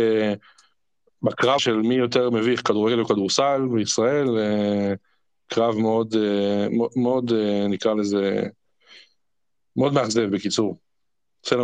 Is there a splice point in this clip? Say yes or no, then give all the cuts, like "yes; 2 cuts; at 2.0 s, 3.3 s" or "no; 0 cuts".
yes; 1 cut; at 1.6 s